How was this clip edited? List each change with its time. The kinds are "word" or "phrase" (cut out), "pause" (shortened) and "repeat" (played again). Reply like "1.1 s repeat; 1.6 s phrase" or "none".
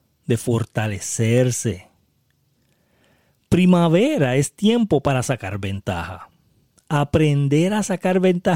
none